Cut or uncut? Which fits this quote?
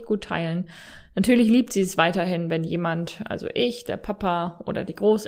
uncut